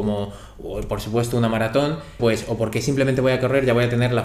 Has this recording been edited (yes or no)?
yes